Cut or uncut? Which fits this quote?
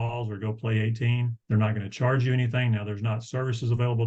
cut